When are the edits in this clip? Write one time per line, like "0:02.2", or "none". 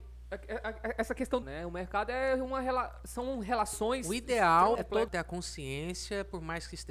0:01.4
0:04.7
0:05.1

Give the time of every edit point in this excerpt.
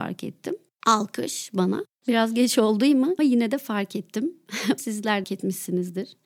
0:03.2
0:04.8
0:05.2

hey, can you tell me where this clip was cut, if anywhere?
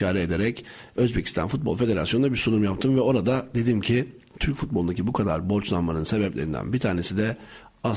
none

